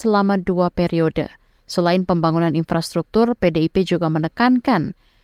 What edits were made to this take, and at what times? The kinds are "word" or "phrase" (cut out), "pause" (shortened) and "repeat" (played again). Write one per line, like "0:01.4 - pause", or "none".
none